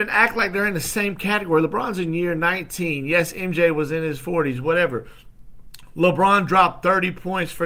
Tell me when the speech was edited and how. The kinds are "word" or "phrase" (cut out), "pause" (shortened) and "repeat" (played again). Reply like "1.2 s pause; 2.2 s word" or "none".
none